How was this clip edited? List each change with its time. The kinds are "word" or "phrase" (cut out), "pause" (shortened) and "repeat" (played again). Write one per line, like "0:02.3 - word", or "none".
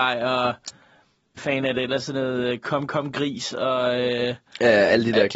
0:01.4 - word